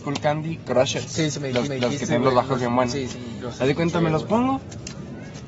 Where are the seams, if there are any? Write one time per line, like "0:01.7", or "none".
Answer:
0:01.7